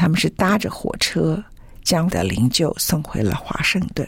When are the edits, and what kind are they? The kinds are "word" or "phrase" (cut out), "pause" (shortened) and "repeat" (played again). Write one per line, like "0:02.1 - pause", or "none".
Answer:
0:02.1 - word